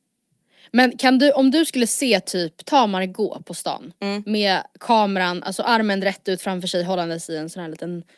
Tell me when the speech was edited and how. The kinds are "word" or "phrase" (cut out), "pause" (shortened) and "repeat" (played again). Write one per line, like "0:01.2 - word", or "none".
none